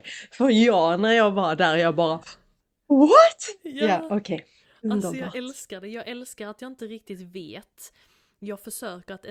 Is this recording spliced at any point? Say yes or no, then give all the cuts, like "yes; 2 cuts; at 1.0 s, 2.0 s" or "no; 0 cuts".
yes; 1 cut; at 2.6 s